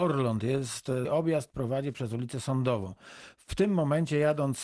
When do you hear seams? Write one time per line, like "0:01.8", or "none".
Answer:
0:01.0